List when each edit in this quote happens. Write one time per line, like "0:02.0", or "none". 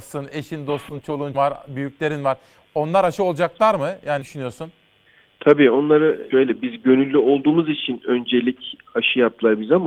0:01.3
0:04.2
0:06.3